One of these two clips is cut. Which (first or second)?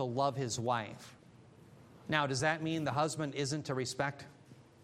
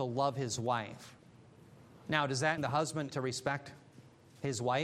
second